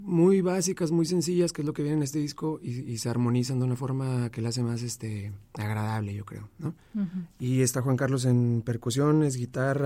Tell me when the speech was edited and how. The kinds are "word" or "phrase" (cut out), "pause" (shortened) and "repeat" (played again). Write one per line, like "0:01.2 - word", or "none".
0:05.4 - pause